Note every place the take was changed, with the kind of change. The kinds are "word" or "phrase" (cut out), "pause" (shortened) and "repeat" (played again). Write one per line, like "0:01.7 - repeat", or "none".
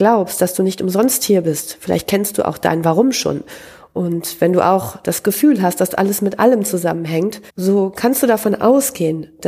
0:07.5 - pause